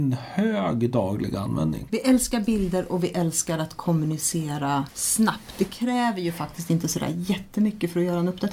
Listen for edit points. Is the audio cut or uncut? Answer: uncut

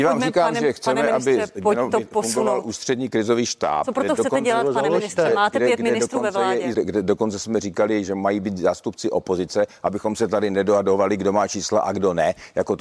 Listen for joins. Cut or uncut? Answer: cut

